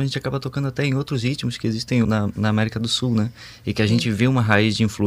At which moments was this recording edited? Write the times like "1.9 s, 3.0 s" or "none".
2.0 s